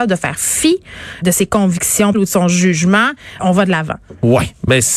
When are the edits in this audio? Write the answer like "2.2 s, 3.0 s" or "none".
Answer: 1.2 s, 2.1 s, 3.4 s